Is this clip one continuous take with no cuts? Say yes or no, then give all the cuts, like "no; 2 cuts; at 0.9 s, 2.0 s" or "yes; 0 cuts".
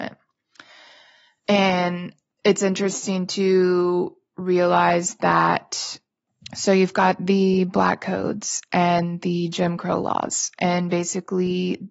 yes; 0 cuts